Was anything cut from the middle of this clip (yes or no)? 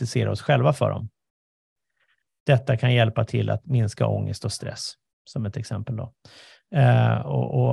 no